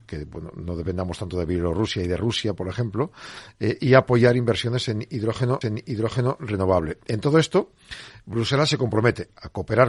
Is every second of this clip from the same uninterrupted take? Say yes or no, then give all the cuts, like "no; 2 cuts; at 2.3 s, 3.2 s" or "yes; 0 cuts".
no; 1 cut; at 5.6 s